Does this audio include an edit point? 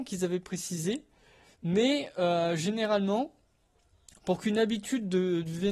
no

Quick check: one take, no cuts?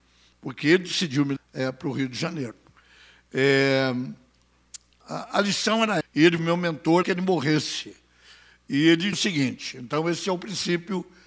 no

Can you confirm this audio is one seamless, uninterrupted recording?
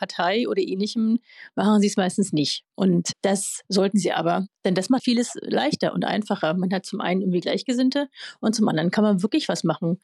no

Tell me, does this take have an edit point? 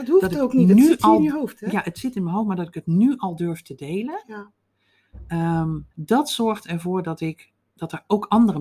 yes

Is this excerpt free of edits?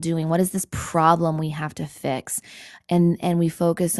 yes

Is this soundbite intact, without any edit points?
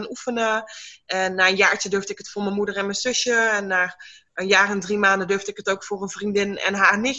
yes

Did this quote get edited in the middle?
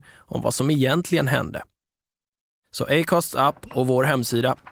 no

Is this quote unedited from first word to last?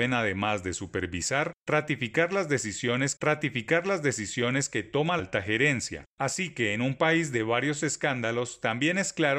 no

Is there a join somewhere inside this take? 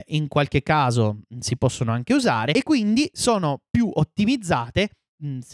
no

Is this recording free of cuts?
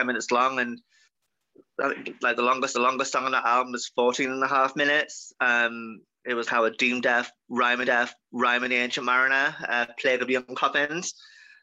no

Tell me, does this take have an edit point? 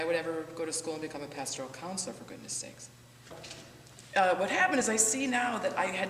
no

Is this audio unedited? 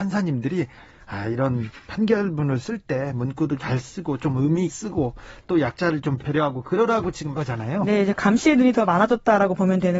no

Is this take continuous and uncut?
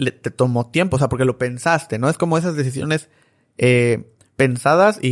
yes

